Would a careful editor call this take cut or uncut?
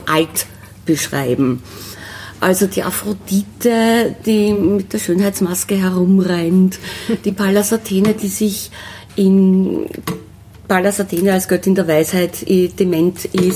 uncut